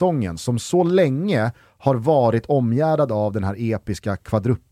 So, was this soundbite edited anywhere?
no; 0 cuts

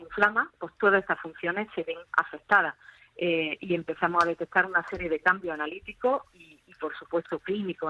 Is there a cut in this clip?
yes; 1 cut; at 2.1 s

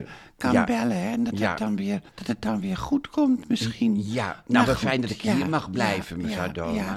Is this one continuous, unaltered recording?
no; 1 cut; at 2.1 s

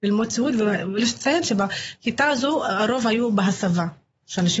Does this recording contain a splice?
no; 0 cuts

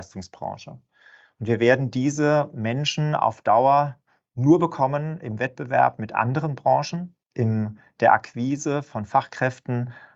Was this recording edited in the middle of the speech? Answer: no; 0 cuts

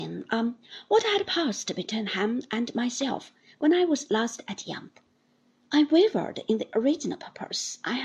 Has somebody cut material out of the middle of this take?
no; 0 cuts

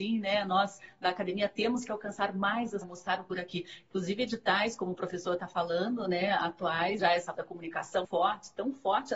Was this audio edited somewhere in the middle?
yes; 5 cuts; at 2.8 s, 3.3 s, 7.0 s, 7.3 s, 8.0 s

